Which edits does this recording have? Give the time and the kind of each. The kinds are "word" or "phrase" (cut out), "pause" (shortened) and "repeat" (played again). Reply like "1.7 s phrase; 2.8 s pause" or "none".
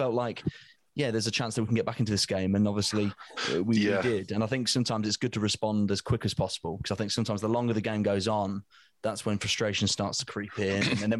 none